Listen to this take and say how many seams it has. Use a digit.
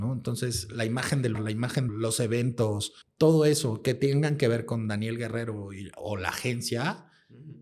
3